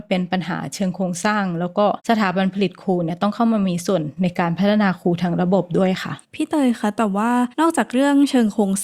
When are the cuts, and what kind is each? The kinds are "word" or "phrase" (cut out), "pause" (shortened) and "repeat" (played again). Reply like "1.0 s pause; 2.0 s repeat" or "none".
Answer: 2.0 s pause; 6.2 s pause; 7.5 s pause